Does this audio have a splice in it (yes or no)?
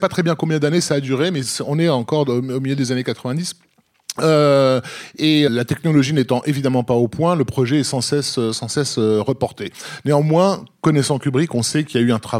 yes